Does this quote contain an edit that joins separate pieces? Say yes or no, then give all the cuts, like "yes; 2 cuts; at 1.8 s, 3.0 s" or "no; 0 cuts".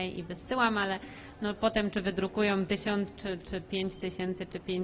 no; 0 cuts